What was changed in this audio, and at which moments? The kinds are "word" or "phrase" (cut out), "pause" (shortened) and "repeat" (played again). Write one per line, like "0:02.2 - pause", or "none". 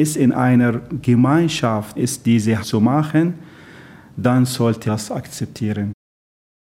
0:02.0 - word
0:02.6 - word
0:04.9 - word